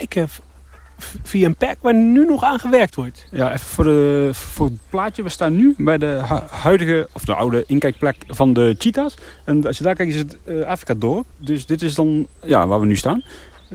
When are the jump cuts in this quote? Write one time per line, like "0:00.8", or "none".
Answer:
0:11.3
0:12.4